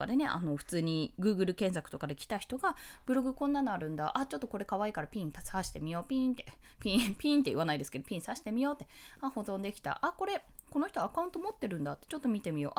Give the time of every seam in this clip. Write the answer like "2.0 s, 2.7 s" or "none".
none